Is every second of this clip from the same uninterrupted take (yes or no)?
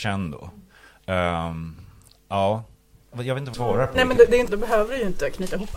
no